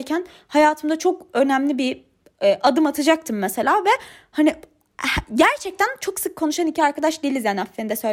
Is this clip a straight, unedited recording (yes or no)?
yes